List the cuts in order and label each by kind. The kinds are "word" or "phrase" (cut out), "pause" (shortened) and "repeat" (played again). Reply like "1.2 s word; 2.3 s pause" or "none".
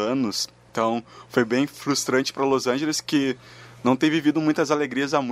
none